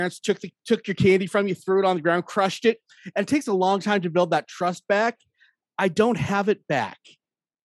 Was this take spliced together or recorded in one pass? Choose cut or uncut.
uncut